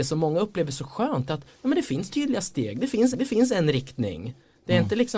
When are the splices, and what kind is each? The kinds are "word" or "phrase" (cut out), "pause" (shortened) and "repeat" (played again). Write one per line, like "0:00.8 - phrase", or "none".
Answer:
0:03.1 - repeat